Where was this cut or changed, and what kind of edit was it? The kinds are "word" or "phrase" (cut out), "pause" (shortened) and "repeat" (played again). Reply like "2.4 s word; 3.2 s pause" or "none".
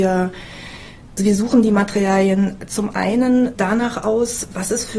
1.2 s word; 3.6 s word